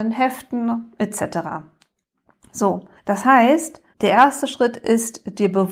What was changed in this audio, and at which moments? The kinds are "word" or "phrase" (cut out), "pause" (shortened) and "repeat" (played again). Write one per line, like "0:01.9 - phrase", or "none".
0:03.0 - pause
0:03.9 - pause